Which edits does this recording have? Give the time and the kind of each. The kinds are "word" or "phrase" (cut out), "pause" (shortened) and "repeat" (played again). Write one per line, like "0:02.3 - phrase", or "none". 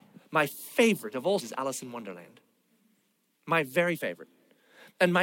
0:01.4 - word